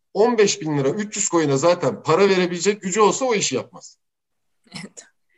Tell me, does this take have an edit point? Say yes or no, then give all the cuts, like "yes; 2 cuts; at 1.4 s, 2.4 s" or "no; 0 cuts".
no; 0 cuts